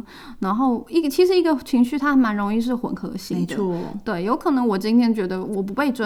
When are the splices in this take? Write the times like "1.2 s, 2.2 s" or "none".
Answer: none